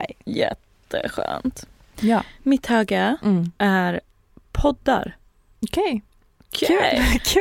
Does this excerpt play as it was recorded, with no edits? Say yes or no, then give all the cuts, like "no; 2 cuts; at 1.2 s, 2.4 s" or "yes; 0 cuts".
no; 1 cut; at 4.3 s